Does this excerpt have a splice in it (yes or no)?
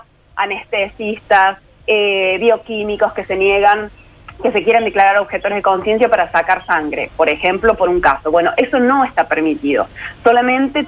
no